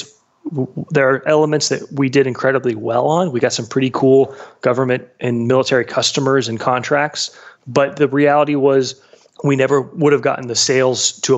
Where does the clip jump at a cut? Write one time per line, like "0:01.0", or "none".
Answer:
none